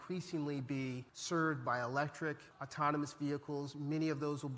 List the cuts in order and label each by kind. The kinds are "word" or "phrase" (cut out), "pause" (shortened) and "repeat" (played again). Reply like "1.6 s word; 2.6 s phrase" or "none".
1.1 s pause; 2.5 s pause